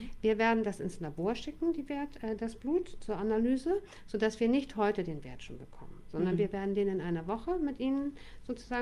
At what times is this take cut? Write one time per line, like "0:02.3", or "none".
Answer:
none